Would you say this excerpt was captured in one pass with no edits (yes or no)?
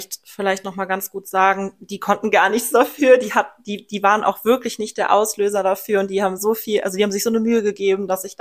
yes